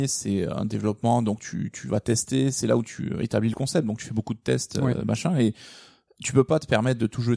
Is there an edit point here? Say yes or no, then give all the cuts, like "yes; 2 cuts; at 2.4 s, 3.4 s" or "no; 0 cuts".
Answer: no; 0 cuts